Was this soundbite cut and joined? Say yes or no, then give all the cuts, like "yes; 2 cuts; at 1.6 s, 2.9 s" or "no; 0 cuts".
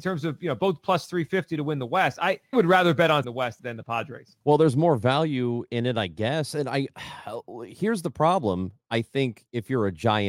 yes; 4 cuts; at 2.5 s, 3.2 s, 3.6 s, 4.4 s